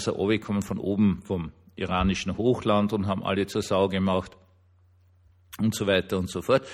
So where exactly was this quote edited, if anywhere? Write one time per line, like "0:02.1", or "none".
none